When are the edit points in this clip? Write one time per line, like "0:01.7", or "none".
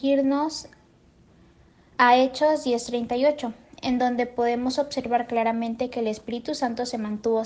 none